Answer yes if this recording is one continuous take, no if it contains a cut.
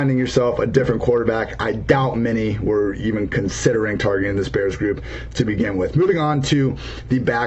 yes